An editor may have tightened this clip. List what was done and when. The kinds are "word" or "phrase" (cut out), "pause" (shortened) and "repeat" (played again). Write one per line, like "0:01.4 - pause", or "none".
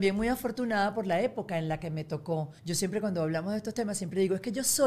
0:02.6 - pause